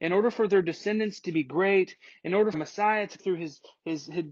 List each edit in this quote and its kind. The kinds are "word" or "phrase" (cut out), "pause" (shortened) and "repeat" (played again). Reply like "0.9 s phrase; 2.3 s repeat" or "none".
2.5 s word; 3.2 s word

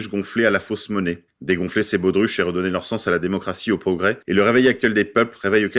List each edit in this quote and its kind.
none

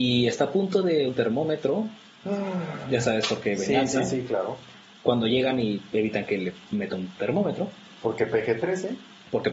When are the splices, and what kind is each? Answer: 1.1 s word

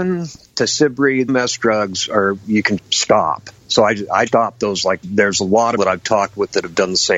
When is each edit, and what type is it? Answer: 1.3 s word; 2.8 s word; 3.6 s pause; 4.3 s word; 5.0 s word; 5.8 s phrase

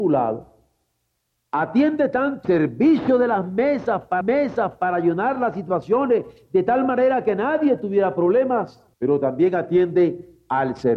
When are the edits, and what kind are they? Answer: 2.4 s word; 4.2 s repeat; 8.9 s pause

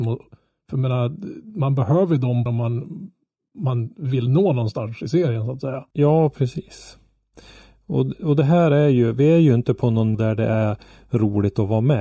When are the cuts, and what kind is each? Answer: 2.5 s word; 5.9 s pause; 10.1 s word

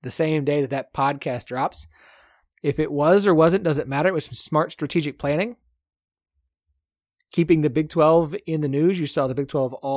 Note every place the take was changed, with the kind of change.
none

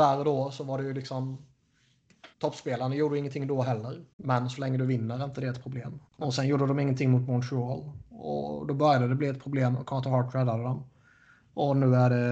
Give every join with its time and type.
2.3 s pause; 4.1 s pause; 6.1 s pause; 8.1 s pause

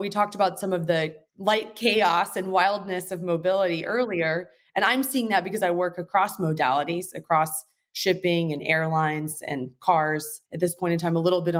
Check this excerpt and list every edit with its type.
none

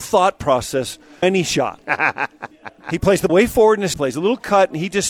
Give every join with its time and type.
1.2 s word; 3.3 s word; 3.9 s word

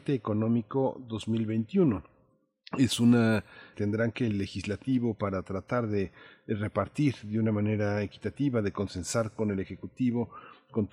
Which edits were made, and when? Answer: 3.7 s phrase; 4.3 s phrase

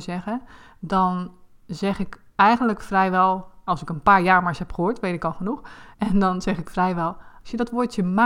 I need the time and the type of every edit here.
3.7 s word; 5.9 s pause

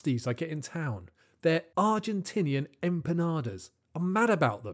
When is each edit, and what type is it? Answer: none

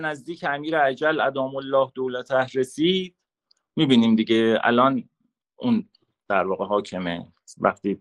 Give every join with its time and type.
none

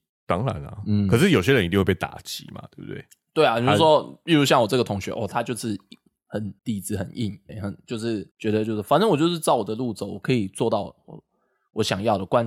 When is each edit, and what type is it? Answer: 6.6 s pause; 7.5 s word; 8.3 s pause

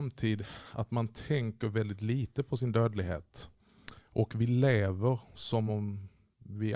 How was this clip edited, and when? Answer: none

